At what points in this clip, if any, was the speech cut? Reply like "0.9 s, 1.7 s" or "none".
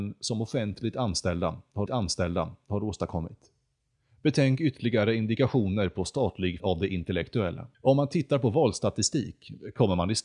1.9 s, 6.6 s, 7.7 s